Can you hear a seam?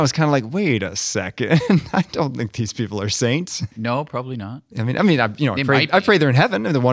yes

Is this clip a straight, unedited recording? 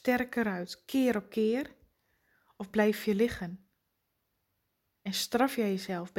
yes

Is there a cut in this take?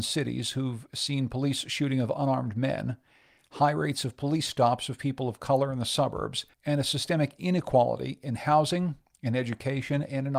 yes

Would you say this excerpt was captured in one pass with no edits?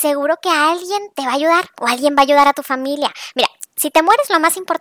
yes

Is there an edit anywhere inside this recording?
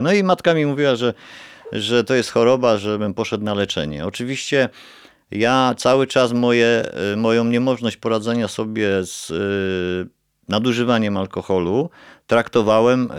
no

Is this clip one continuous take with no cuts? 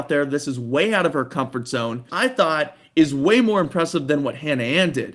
no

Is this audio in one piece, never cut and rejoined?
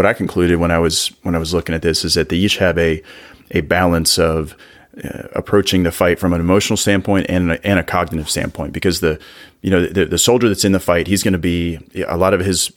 yes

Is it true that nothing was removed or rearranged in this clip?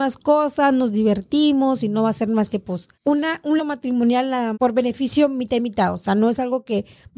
no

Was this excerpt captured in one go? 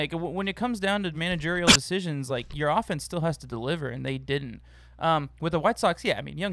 yes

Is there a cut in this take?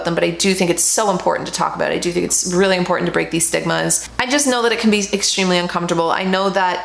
no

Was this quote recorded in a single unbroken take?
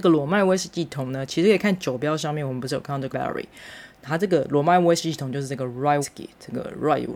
no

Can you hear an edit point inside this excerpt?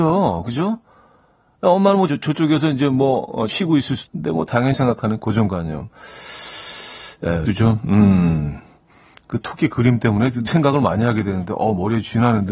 yes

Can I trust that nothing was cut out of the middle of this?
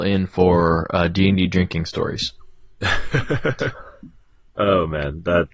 yes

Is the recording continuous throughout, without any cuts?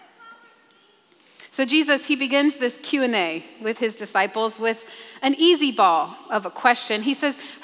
yes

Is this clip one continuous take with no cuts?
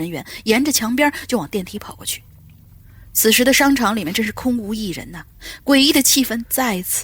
yes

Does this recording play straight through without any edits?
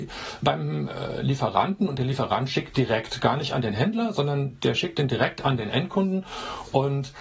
yes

